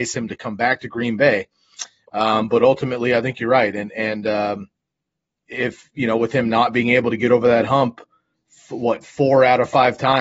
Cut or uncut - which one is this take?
uncut